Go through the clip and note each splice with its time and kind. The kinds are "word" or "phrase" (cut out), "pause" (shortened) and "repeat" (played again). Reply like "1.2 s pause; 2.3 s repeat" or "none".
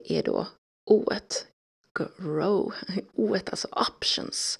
none